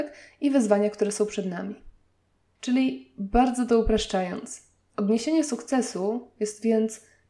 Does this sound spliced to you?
no; 0 cuts

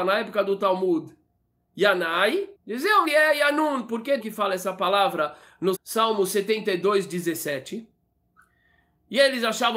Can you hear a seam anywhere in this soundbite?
yes; 4 cuts; at 2.5 s, 3.0 s, 4.2 s, 5.7 s

